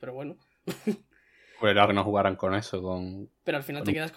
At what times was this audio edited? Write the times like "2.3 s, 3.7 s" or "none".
1.9 s

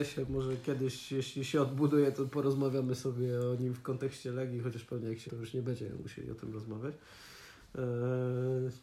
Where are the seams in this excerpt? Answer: 5.3 s

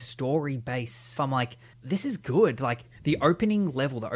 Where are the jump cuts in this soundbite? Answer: 1.2 s, 1.7 s

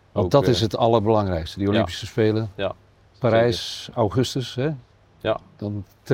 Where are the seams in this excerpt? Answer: none

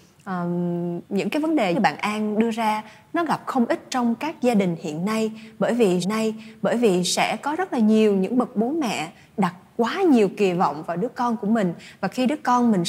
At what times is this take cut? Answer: 1.7 s, 6.0 s

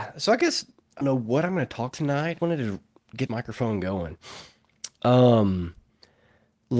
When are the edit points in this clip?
1.0 s, 1.9 s, 2.4 s, 3.3 s

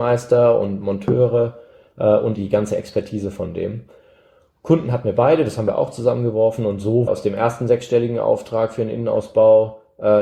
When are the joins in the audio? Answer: 2.4 s, 7.1 s

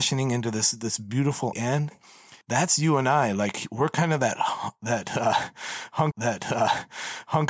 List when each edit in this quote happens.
1.5 s, 2.4 s, 6.1 s

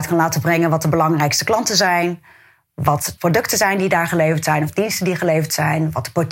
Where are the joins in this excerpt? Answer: 3.2 s

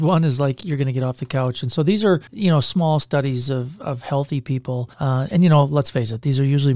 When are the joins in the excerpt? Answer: 2.3 s, 4.9 s

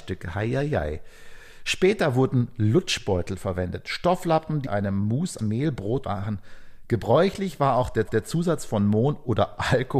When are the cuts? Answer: 4.7 s, 5.4 s, 6.0 s, 8.1 s

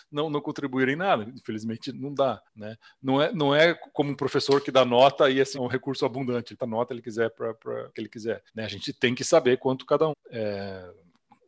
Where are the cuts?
1.9 s, 2.4 s, 5.5 s, 6.6 s, 7.9 s, 8.5 s, 10.1 s

